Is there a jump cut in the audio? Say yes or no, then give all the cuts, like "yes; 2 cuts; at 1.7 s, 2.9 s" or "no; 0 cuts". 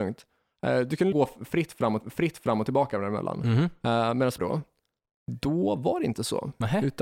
yes; 3 cuts; at 1.1 s, 2.0 s, 4.4 s